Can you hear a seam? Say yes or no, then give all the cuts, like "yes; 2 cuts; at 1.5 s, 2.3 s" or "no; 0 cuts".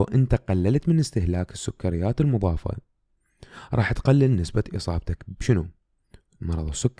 no; 0 cuts